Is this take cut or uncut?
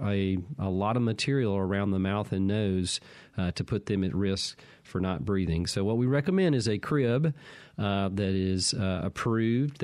uncut